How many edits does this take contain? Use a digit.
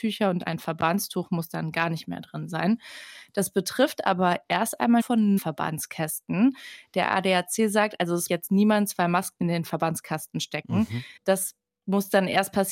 5